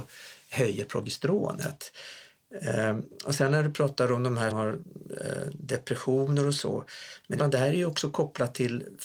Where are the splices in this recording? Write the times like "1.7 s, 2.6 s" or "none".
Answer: 4.5 s, 7.4 s

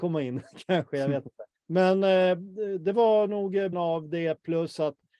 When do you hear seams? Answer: 1.6 s, 3.7 s

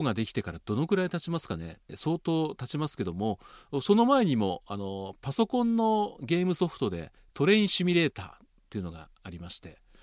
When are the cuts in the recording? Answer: 1.9 s, 7.2 s

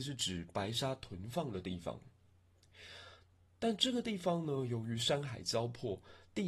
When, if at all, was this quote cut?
none

